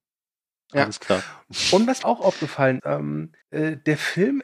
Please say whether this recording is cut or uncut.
cut